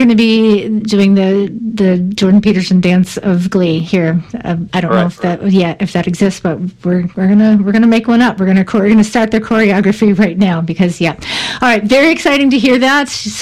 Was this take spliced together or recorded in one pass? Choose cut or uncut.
uncut